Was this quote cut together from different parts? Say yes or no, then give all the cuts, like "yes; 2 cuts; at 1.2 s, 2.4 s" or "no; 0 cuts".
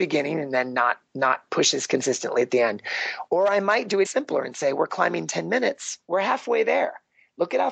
yes; 3 cuts; at 1.1 s, 4.0 s, 6.0 s